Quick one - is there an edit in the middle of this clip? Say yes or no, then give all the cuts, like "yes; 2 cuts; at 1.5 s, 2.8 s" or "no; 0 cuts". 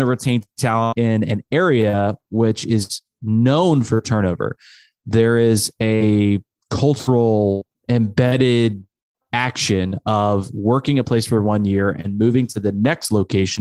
no; 0 cuts